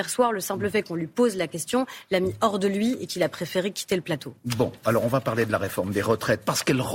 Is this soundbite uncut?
yes; 0 cuts

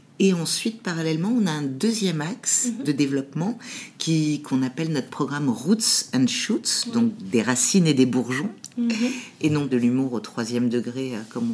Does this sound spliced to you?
yes; 1 cut; at 9.7 s

